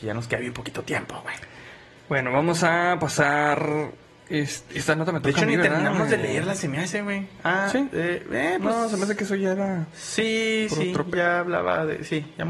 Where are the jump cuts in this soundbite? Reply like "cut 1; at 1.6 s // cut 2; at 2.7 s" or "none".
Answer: none